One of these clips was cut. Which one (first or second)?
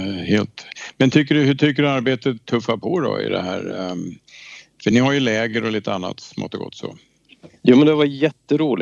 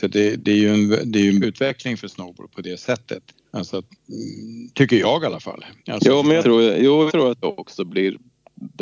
second